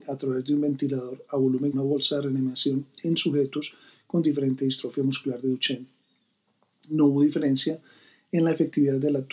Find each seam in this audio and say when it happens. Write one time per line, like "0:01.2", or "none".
0:01.7